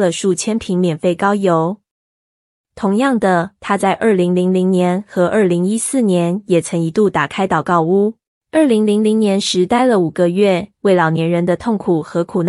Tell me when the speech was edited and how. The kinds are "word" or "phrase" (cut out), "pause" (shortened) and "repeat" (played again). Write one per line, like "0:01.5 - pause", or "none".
0:03.5 - pause
0:08.3 - pause
0:10.7 - pause